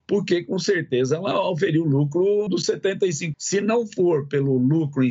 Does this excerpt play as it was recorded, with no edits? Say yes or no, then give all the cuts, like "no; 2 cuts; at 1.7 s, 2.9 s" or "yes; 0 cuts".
no; 2 cuts; at 2.5 s, 3.3 s